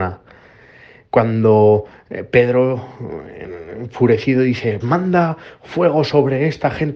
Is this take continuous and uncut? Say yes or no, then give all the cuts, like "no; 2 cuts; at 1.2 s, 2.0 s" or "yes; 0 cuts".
no; 1 cut; at 4.8 s